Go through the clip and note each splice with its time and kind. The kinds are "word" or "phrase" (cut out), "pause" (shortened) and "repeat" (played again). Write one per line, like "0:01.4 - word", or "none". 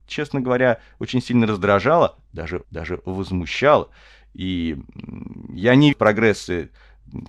0:02.6 - repeat
0:05.9 - word